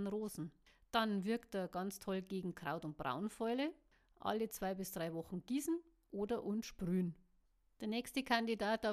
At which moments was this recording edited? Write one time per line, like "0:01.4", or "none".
none